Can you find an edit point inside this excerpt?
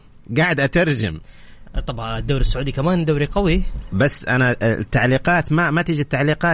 no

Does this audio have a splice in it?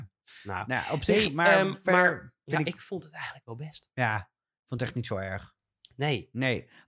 no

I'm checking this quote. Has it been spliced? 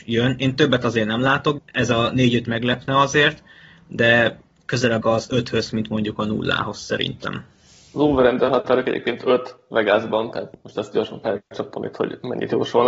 yes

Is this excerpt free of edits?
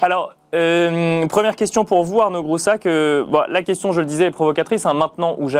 yes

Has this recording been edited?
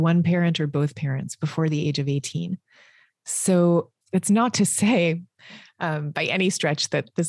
yes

